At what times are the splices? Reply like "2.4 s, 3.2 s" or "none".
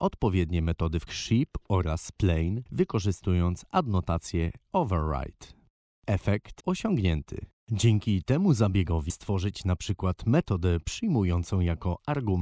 1.1 s, 2.7 s, 6.6 s, 9.1 s